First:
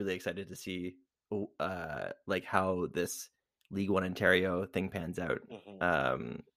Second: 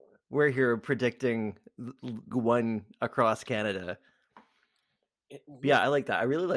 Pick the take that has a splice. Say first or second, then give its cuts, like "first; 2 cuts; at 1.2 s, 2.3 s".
second; 1 cut; at 2.3 s